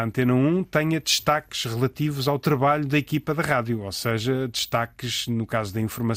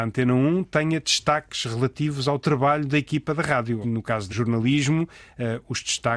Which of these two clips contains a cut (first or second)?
second